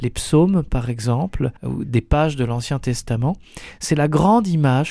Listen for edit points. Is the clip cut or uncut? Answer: cut